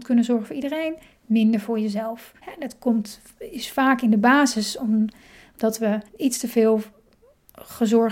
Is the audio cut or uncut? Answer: cut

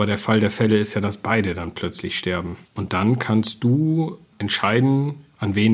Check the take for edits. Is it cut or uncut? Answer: cut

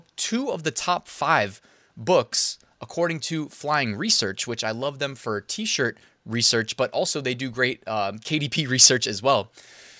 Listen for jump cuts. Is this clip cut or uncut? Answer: uncut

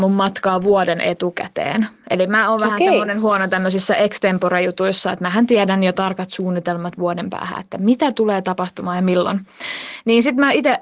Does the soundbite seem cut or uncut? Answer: uncut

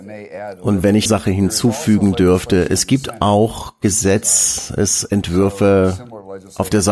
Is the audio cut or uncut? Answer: cut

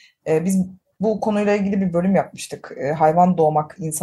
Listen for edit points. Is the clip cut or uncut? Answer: uncut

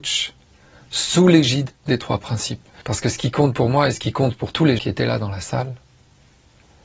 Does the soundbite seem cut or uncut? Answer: cut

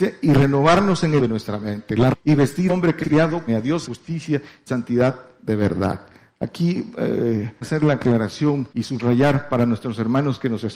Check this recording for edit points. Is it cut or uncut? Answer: cut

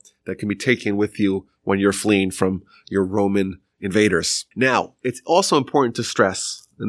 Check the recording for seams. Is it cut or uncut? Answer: cut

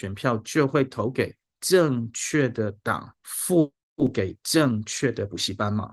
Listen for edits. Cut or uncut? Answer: cut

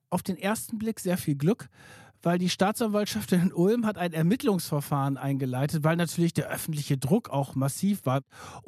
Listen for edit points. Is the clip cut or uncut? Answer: uncut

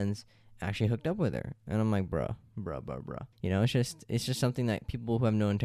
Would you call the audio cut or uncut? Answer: cut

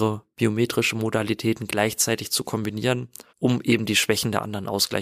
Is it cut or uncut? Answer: cut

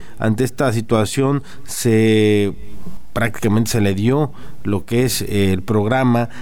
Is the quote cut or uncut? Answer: uncut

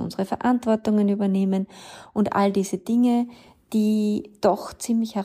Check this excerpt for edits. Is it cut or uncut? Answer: uncut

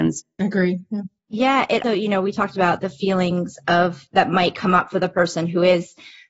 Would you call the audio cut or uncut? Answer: cut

